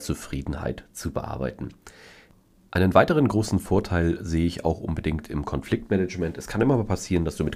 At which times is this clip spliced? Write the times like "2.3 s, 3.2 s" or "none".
none